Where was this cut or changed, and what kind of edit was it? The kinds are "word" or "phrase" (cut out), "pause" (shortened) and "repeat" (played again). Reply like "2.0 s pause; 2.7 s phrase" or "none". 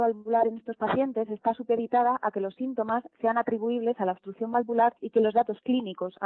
5.0 s pause

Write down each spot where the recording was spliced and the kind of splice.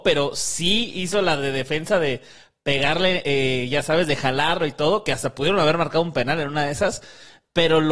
none

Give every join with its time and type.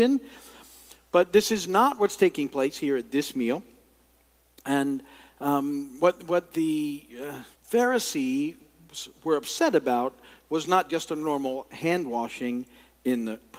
7.5 s pause

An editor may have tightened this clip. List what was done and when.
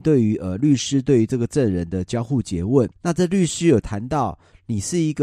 3.0 s pause

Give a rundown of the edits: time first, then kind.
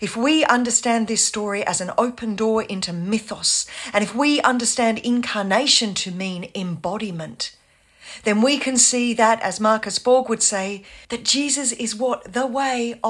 11.0 s pause

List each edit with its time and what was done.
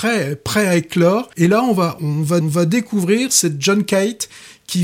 1.3 s pause; 2.0 s word; 2.4 s repeat

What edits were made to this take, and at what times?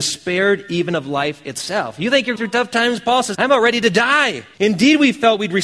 2.4 s word; 3.3 s word; 4.5 s pause

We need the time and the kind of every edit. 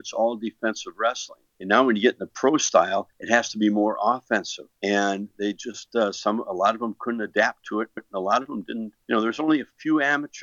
1.5 s pause; 3.1 s pause; 4.8 s pause; 8.0 s repeat; 9.0 s pause

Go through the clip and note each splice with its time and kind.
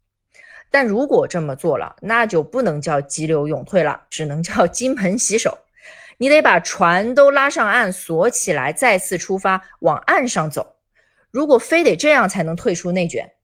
none

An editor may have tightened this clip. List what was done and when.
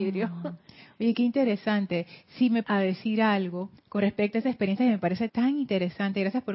2.6 s phrase; 3.8 s pause; 5.3 s word

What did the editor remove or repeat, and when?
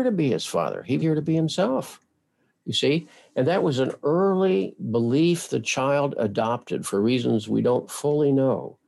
1.0 s word

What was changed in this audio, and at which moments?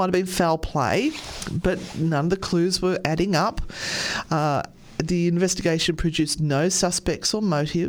none

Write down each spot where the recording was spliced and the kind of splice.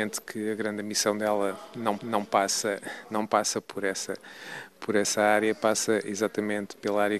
2.0 s repeat

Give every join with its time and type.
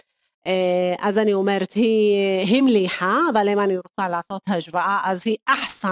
none

